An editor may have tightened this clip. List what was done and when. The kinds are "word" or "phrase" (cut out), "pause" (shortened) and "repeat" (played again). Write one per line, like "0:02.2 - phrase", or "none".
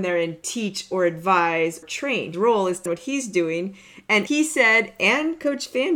0:01.8 - word
0:02.3 - word
0:02.9 - word
0:04.3 - word